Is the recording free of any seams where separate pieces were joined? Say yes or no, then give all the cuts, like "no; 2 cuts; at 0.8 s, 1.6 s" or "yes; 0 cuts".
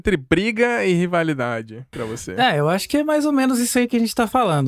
yes; 0 cuts